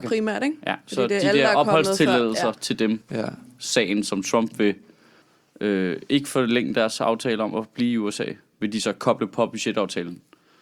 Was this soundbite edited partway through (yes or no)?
yes